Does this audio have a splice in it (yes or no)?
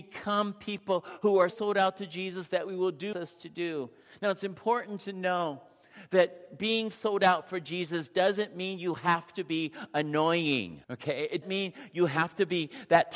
yes